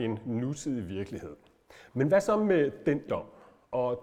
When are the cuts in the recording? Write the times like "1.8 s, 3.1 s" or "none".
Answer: 3.1 s

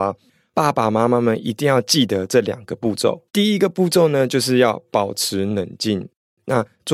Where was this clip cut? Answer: 3.3 s

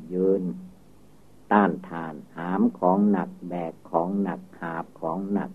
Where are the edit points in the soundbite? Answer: 2.3 s

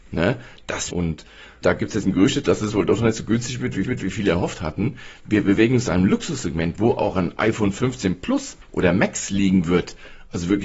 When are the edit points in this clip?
0.9 s, 1.6 s, 2.0 s, 3.8 s, 8.6 s

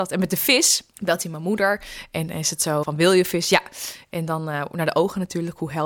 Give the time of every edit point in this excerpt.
0.9 s, 2.8 s

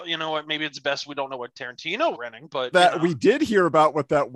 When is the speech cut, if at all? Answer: 2.1 s, 2.7 s

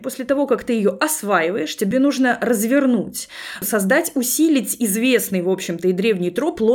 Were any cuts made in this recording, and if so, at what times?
none

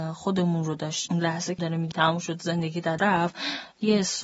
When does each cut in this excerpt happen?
1.1 s, 1.6 s, 1.9 s, 3.0 s

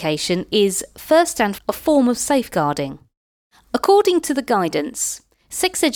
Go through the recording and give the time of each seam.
1.6 s

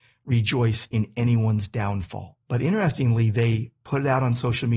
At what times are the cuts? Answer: 2.4 s

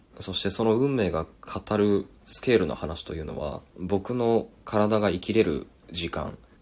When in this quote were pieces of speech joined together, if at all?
3.7 s, 4.6 s

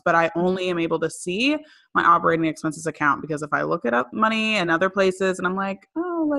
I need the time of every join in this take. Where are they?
none

